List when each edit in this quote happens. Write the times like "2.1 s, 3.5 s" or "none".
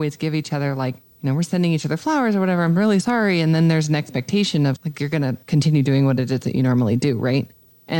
3.0 s, 4.8 s, 5.4 s